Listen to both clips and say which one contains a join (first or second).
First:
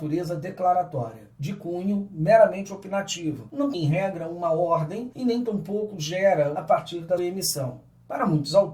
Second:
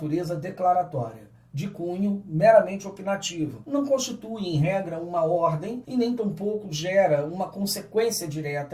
first